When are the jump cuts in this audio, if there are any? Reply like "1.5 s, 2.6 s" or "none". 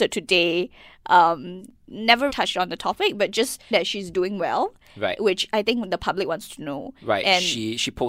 2.3 s, 3.7 s